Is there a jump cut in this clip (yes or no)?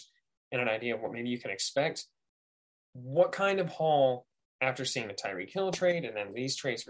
no